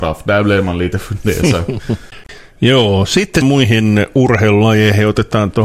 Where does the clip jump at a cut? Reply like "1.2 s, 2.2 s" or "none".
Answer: 3.4 s